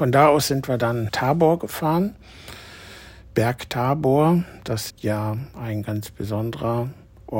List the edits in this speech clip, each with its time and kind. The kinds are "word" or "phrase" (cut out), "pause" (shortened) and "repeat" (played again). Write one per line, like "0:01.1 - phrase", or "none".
0:01.1 - word
0:04.9 - word